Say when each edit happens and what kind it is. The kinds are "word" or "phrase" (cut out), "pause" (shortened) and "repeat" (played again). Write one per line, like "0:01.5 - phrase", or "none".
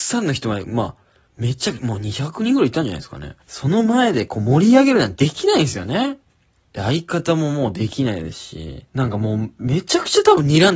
0:01.3 - pause
0:03.4 - pause
0:06.3 - pause
0:08.9 - pause